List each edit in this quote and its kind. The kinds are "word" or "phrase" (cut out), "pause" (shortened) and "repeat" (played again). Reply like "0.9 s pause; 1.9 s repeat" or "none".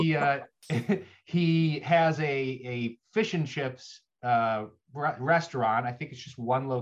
none